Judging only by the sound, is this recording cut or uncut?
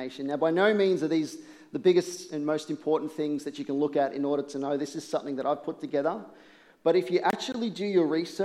uncut